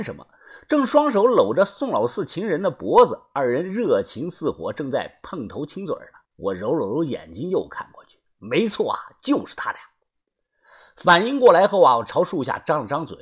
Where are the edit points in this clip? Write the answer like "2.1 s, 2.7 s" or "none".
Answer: 6.3 s